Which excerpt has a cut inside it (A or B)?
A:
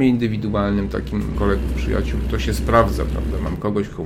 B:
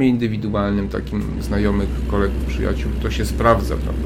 A